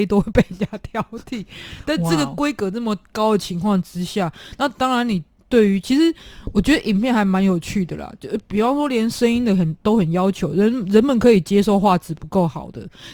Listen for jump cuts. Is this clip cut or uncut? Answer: uncut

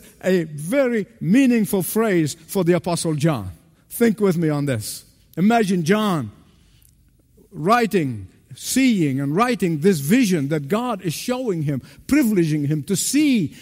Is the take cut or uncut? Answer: uncut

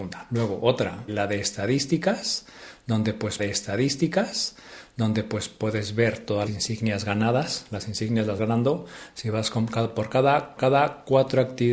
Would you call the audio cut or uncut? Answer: cut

